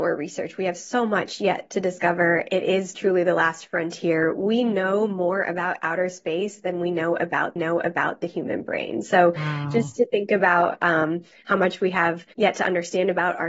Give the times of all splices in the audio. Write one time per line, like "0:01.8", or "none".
0:07.6
0:12.3